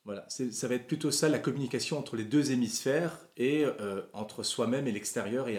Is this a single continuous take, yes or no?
yes